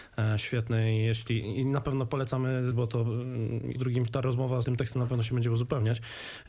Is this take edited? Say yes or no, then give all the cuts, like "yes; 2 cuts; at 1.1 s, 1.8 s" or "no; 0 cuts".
yes; 3 cuts; at 2.7 s, 3.8 s, 4.6 s